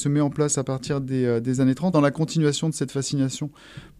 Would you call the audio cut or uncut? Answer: cut